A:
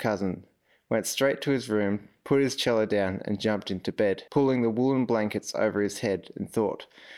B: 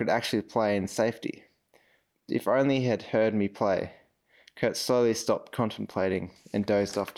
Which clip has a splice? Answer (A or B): A